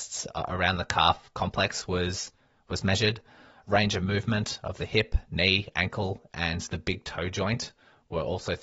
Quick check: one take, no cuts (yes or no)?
yes